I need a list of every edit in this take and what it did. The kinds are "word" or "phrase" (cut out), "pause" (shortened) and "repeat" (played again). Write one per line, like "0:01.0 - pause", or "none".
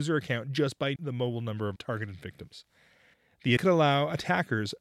0:01.0 - word
0:01.8 - word
0:03.6 - word